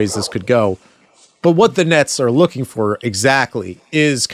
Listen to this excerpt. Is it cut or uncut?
uncut